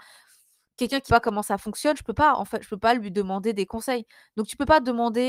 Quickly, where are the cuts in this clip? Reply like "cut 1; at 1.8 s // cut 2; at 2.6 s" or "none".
cut 1; at 1.1 s